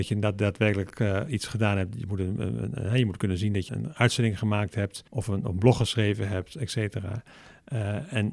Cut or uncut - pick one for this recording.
cut